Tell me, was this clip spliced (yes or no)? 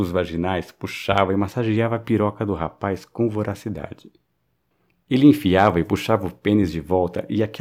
no